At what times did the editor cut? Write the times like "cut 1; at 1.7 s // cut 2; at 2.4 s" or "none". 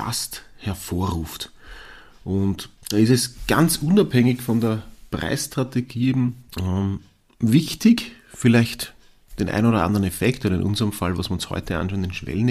cut 1; at 2.8 s // cut 2; at 6.5 s